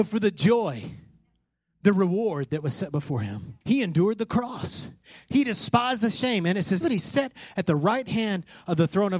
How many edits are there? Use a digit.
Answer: 2